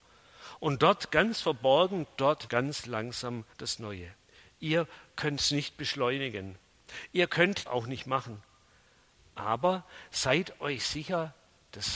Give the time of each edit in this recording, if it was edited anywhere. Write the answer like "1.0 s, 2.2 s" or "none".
2.5 s, 3.5 s, 4.3 s, 7.7 s